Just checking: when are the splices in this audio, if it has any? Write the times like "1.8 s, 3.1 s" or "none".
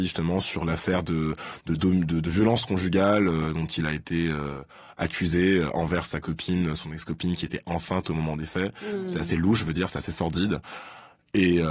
none

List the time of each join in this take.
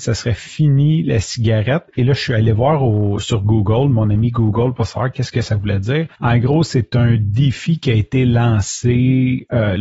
6.2 s

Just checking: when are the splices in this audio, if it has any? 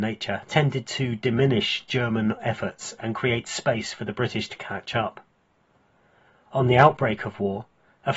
none

